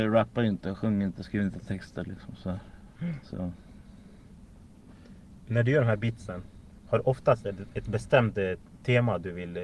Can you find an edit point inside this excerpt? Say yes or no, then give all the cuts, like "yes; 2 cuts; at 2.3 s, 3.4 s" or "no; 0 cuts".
no; 0 cuts